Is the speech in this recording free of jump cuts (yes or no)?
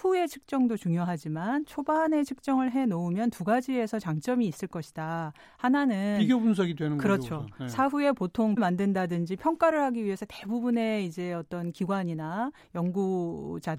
no